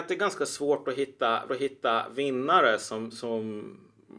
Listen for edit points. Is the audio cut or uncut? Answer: cut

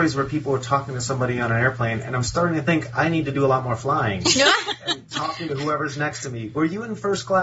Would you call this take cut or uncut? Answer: uncut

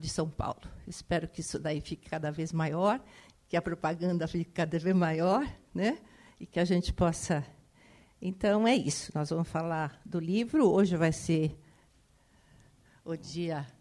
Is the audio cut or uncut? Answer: uncut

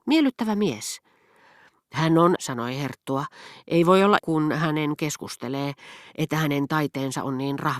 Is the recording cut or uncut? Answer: cut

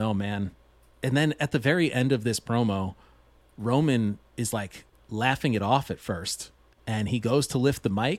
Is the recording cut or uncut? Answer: uncut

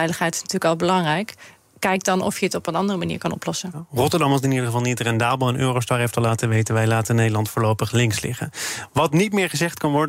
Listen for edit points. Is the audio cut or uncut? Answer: uncut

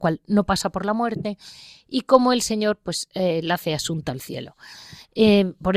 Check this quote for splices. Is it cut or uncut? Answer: uncut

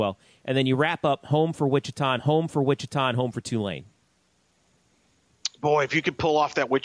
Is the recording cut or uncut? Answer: cut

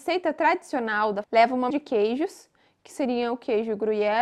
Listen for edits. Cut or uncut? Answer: cut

